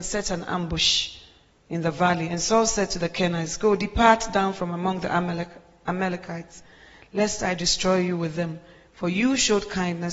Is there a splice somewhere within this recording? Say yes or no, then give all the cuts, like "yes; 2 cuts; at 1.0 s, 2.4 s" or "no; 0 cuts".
no; 0 cuts